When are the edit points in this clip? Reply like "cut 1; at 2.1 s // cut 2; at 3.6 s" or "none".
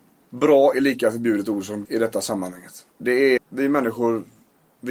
cut 1; at 1.8 s // cut 2; at 2.9 s // cut 3; at 3.4 s